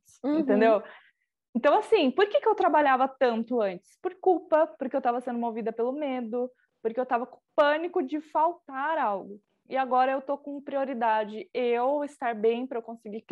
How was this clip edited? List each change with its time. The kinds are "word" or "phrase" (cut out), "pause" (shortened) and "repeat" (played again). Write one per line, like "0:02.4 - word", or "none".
none